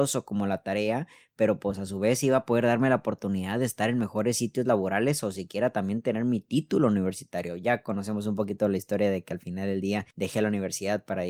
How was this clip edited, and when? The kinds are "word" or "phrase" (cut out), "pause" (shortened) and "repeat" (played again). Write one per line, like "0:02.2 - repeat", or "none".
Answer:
0:10.1 - pause